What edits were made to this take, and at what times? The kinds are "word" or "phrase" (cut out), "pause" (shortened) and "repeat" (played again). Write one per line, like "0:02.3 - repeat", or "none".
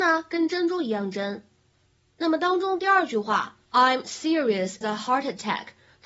0:03.7 - pause
0:04.8 - word